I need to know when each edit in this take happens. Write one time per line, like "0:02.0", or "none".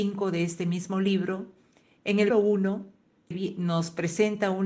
0:02.3
0:03.3